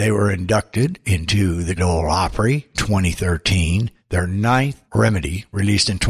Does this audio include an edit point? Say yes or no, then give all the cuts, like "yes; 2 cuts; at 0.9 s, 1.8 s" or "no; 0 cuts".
yes; 4 cuts; at 1.8 s, 2.7 s, 4.0 s, 4.9 s